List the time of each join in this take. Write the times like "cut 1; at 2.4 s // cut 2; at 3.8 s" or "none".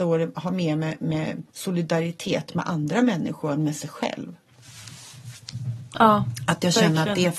cut 1; at 1.5 s